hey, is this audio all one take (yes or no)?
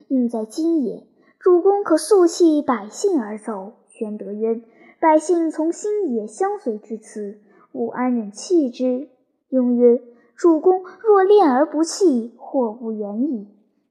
yes